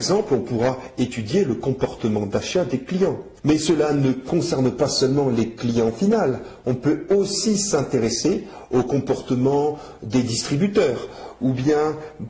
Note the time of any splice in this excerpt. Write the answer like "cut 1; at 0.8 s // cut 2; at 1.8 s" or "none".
cut 1; at 3.4 s